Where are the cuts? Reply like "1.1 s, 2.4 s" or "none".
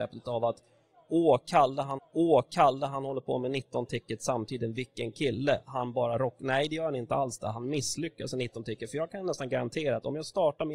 2.0 s